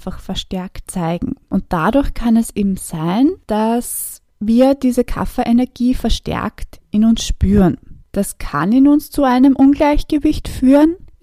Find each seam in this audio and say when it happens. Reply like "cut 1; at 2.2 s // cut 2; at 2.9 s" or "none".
none